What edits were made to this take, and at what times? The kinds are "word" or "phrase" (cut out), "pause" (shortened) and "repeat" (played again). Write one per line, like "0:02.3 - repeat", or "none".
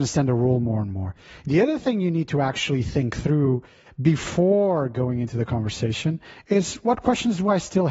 none

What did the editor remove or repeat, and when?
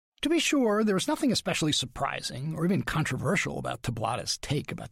none

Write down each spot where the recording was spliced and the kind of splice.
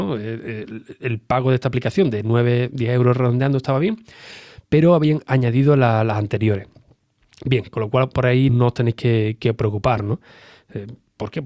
0:08.5 - word

